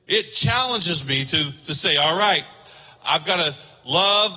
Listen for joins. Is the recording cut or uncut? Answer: uncut